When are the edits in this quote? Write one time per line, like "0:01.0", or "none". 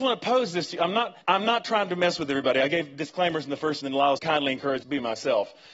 0:01.2
0:03.8
0:04.2
0:04.8